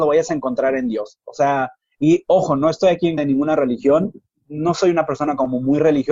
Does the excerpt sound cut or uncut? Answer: cut